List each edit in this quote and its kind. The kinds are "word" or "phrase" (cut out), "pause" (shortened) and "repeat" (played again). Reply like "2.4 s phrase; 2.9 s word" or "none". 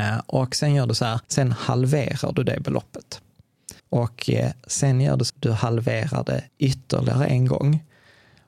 1.2 s pause; 3.8 s pause; 5.3 s word; 6.5 s pause